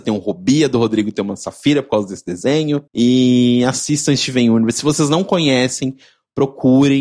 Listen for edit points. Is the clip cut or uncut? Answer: cut